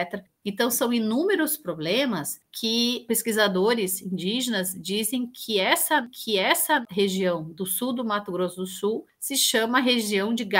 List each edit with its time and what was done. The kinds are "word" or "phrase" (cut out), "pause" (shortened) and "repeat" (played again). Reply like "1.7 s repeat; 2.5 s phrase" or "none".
6.1 s repeat